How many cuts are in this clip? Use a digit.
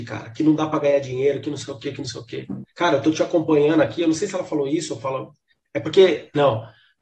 1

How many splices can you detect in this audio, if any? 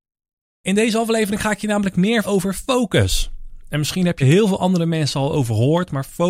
2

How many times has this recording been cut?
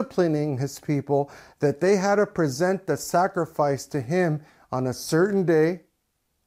0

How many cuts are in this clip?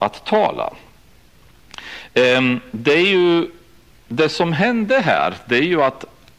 0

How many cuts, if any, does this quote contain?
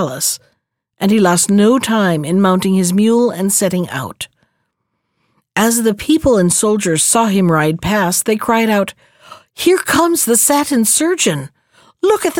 0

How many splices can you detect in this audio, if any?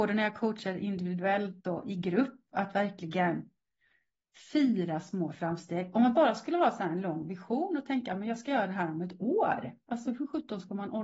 0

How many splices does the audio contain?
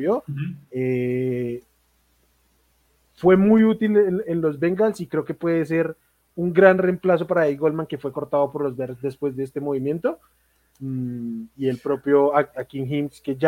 0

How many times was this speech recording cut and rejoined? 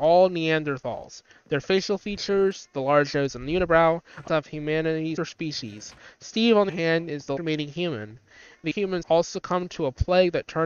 6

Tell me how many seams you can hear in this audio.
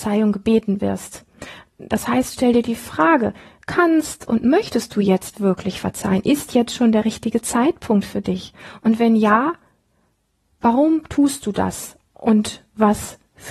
0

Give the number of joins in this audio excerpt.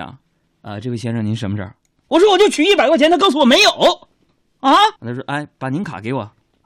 1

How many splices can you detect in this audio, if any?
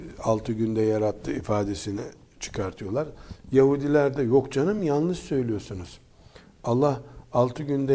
0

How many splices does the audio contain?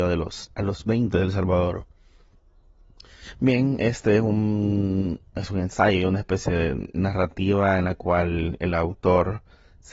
0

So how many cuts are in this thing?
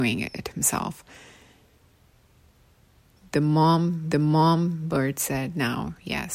1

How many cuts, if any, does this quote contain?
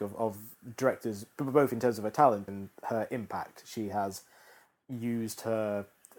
1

